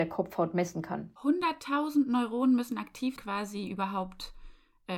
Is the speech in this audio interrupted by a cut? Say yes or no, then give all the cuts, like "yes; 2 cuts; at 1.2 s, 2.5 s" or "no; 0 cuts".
yes; 2 cuts; at 1.2 s, 3.2 s